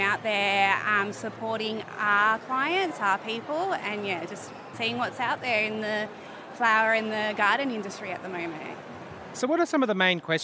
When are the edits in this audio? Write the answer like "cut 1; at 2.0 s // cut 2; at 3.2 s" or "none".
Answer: cut 1; at 4.7 s